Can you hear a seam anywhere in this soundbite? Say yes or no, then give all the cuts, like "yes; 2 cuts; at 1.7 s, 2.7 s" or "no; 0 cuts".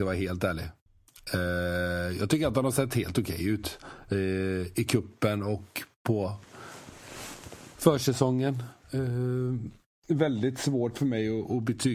no; 0 cuts